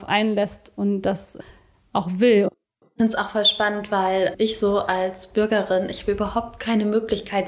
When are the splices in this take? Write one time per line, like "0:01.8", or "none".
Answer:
none